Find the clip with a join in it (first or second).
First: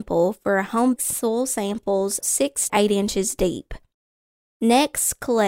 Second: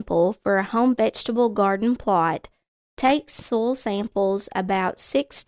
first